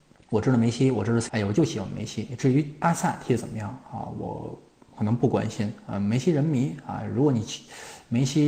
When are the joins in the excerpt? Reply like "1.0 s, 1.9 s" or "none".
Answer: 1.3 s